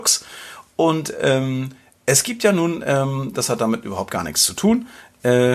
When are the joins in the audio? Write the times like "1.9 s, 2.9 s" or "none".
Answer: none